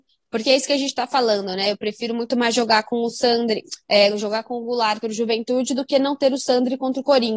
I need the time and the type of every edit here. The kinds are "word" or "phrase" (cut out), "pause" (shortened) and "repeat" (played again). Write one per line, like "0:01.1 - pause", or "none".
0:03.8 - pause
0:05.0 - word